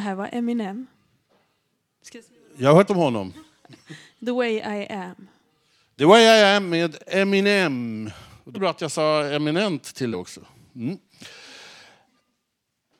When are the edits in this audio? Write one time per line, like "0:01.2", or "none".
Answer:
0:02.9
0:08.5
0:10.1